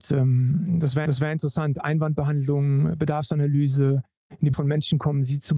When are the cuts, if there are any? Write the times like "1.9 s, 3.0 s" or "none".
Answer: 1.1 s, 4.5 s